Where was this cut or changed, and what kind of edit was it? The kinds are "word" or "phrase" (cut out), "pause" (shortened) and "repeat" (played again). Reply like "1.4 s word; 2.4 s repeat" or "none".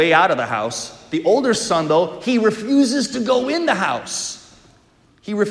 none